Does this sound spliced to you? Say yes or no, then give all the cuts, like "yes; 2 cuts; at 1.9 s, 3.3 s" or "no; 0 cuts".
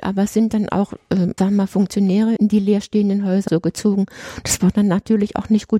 yes; 3 cuts; at 1.4 s, 2.4 s, 3.5 s